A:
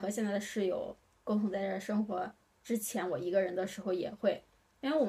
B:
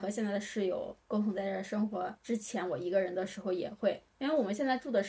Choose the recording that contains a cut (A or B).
B